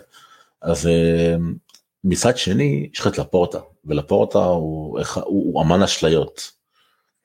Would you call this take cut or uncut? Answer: uncut